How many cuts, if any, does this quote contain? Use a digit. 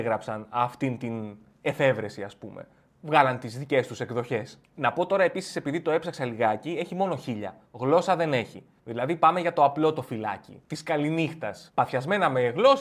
4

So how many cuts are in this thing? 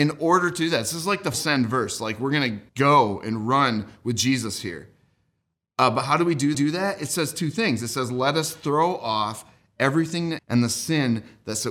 4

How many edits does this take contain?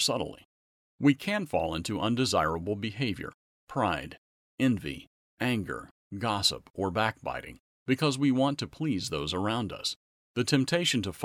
0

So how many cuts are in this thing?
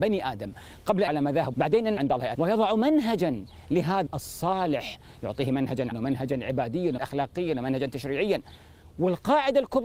7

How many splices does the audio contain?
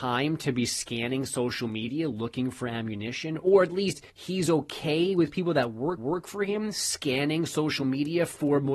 3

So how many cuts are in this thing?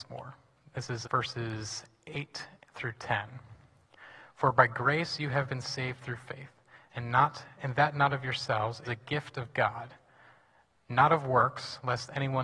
2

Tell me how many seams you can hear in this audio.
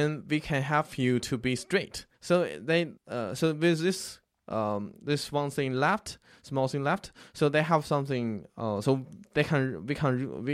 2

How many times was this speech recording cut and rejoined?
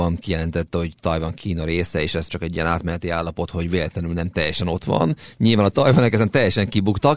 1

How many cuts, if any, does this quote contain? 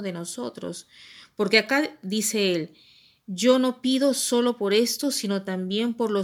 0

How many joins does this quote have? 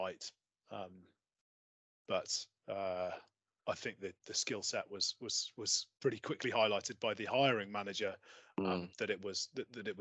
0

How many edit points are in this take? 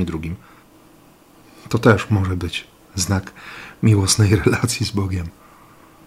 0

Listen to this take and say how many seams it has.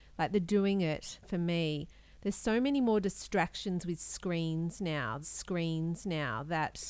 2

